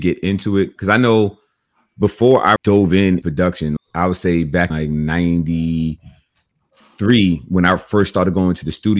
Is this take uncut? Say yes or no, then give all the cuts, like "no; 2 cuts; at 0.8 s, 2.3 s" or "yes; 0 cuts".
no; 4 cuts; at 2.6 s, 3.2 s, 3.8 s, 4.7 s